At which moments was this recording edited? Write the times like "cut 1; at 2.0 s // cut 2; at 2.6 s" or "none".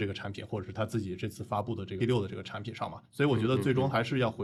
cut 1; at 2.0 s